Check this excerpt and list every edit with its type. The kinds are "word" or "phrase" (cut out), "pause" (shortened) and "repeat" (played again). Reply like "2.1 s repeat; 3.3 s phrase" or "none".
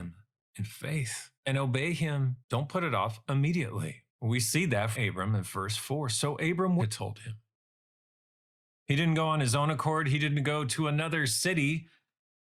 1.3 s pause; 2.4 s pause; 4.1 s pause; 4.9 s word; 6.8 s phrase